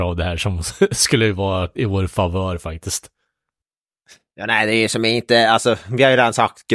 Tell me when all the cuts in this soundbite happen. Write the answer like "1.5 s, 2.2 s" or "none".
none